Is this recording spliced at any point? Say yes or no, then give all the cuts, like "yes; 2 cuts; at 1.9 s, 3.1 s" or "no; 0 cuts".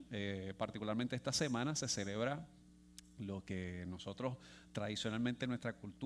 no; 0 cuts